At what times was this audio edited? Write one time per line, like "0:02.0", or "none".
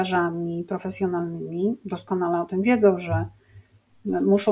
none

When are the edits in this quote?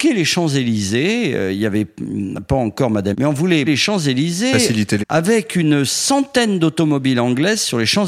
0:03.1
0:03.7
0:05.0

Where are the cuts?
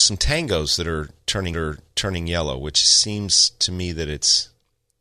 0:01.5

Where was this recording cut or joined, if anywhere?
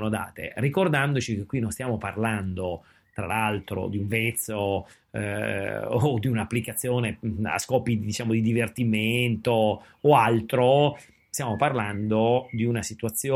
none

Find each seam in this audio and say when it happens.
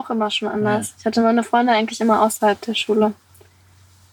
none

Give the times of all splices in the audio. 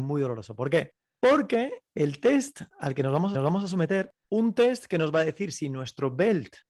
0:02.7
0:03.3
0:04.2

